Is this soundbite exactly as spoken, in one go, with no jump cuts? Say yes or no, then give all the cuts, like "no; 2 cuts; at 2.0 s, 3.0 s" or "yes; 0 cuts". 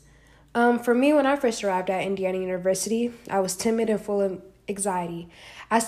yes; 0 cuts